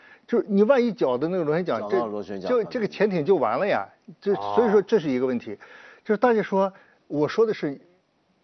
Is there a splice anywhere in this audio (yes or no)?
no